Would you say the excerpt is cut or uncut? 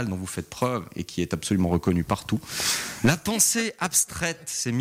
uncut